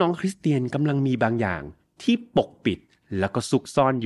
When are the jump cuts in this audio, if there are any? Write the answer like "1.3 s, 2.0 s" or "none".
none